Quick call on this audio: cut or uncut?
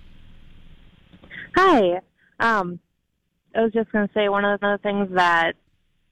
cut